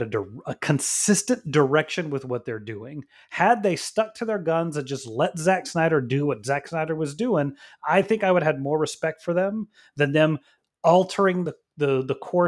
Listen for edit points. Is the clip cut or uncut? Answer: uncut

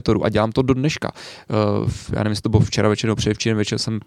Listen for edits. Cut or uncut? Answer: uncut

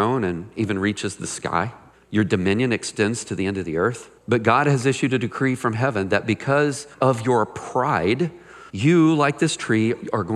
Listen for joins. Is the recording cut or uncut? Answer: cut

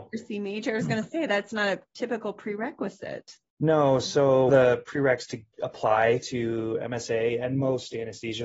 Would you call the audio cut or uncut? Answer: cut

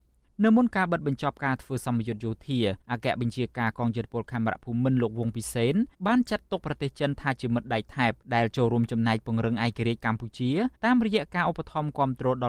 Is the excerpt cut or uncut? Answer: cut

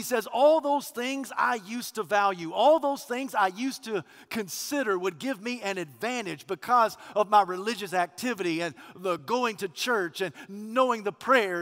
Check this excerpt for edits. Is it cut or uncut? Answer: uncut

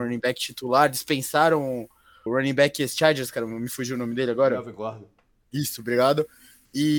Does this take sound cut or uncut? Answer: cut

